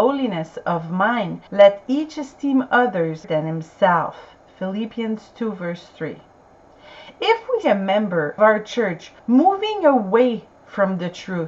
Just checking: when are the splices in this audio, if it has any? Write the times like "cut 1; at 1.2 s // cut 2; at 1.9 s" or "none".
cut 1; at 1.5 s // cut 2; at 3.2 s // cut 3; at 7.6 s // cut 4; at 8.4 s // cut 5; at 9.2 s